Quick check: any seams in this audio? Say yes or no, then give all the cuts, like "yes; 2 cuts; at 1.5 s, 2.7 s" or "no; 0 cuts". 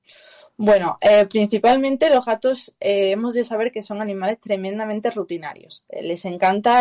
no; 0 cuts